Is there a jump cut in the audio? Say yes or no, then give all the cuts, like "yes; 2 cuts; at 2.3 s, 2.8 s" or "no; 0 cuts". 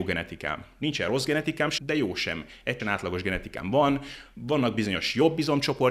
yes; 2 cuts; at 1.8 s, 2.8 s